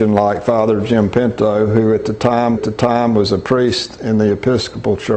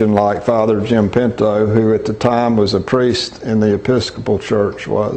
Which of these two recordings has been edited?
first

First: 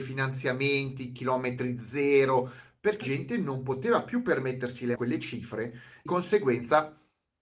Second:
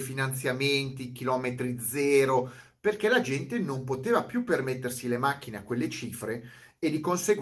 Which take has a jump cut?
first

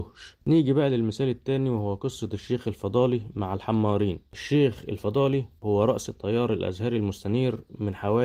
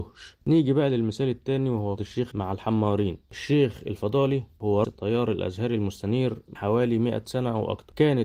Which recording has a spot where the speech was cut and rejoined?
second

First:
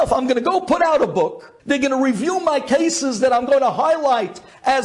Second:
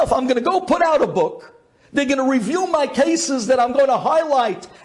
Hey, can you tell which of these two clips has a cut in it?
first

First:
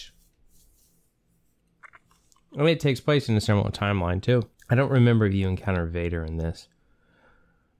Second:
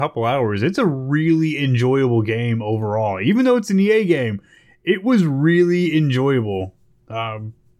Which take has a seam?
first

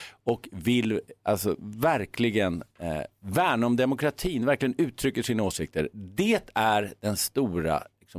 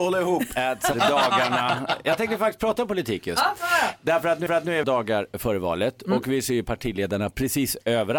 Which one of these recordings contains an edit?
second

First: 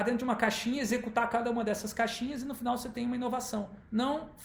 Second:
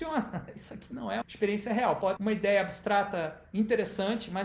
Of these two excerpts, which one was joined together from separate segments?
second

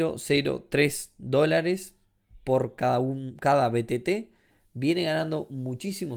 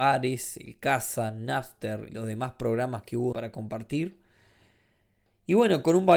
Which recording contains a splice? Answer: second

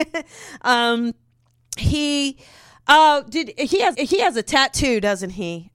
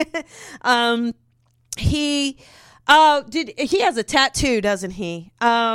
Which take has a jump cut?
first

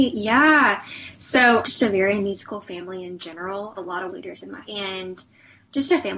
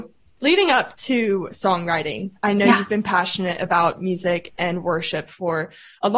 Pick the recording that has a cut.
first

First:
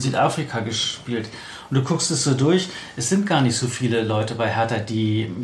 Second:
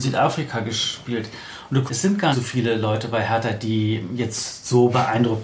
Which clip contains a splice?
second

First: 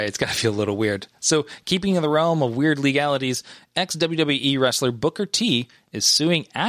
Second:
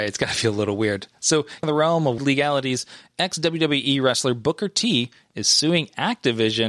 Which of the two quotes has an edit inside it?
second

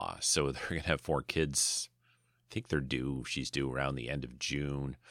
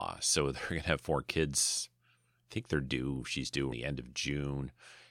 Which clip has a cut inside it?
second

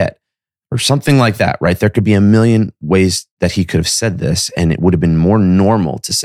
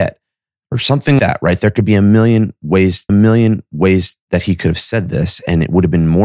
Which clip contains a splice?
second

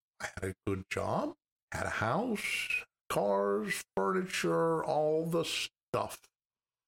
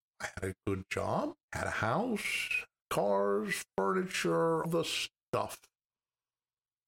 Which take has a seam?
second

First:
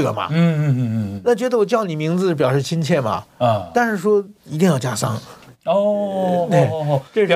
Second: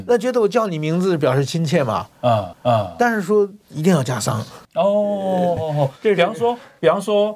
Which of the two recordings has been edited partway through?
second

